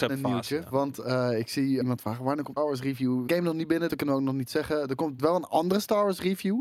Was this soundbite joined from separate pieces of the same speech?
yes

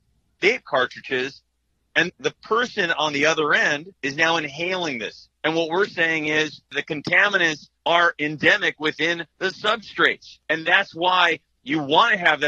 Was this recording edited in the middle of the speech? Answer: yes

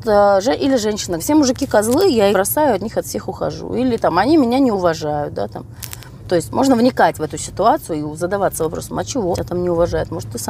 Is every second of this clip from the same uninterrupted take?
no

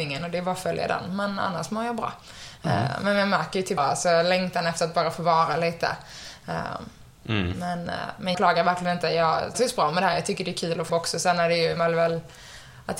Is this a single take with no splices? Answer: no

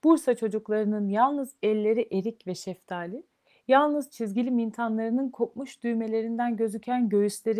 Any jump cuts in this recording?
no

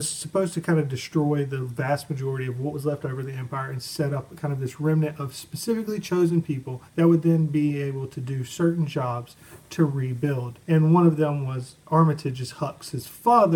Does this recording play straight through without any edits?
no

